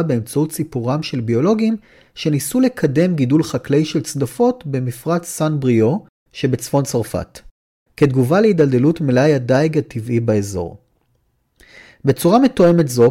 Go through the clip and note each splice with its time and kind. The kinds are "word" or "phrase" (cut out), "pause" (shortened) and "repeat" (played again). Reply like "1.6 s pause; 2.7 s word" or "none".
none

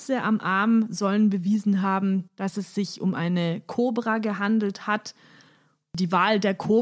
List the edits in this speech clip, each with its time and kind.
2.3 s pause

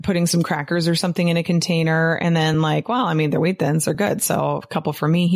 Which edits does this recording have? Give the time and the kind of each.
none

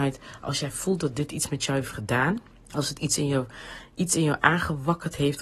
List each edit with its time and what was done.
2.5 s pause

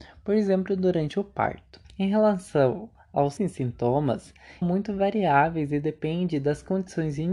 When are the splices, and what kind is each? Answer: 1.8 s pause; 3.4 s word; 4.6 s phrase

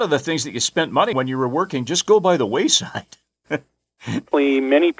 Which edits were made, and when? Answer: 1.1 s word

